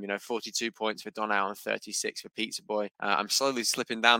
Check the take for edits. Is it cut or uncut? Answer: cut